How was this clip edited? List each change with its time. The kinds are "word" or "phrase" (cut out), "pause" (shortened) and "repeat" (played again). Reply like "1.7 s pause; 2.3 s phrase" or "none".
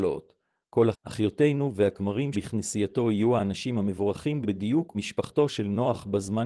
0.9 s word; 2.3 s word; 4.4 s word; 4.9 s word